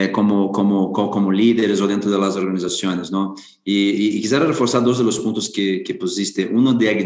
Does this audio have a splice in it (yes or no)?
no